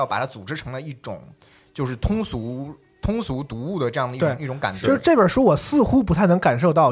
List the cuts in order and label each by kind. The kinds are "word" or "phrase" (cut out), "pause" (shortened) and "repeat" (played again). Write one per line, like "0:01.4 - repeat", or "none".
none